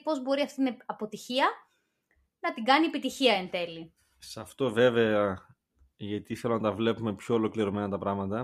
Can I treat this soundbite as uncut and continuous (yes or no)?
yes